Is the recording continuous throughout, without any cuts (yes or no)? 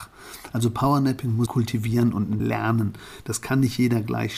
no